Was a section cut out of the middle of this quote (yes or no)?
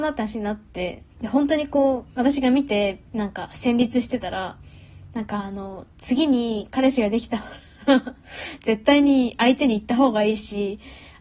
yes